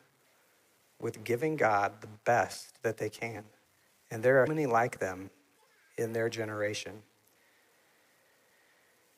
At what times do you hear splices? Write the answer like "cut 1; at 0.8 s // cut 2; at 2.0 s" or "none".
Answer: cut 1; at 2.8 s // cut 2; at 3.6 s // cut 3; at 4.5 s